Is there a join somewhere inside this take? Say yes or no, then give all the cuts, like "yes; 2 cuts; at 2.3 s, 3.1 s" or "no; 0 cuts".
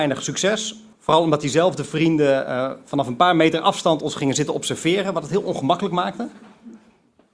yes; 1 cut; at 0.9 s